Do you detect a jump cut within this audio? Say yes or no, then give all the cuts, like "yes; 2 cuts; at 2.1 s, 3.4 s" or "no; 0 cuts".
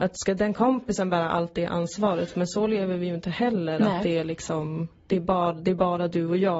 no; 0 cuts